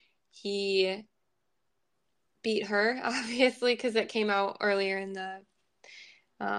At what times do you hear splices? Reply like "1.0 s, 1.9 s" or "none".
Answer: none